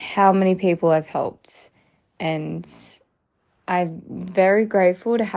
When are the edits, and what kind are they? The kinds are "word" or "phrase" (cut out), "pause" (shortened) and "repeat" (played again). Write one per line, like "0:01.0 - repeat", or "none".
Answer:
none